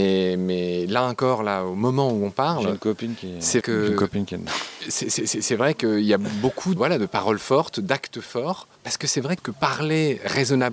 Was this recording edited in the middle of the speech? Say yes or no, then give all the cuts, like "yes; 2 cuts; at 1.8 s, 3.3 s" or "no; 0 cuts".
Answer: yes; 4 cuts; at 3.6 s, 6.8 s, 8.7 s, 9.4 s